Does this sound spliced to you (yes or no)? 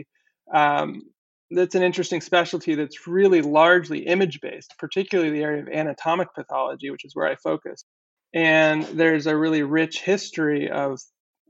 yes